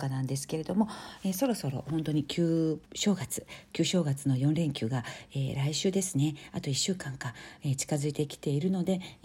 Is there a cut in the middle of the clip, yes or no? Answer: yes